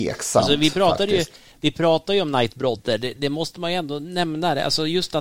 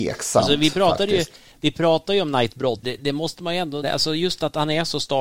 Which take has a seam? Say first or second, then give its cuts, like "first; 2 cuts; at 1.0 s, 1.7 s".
second; 2 cuts; at 2.8 s, 3.8 s